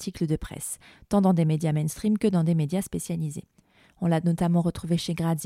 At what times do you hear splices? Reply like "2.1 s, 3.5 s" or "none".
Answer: none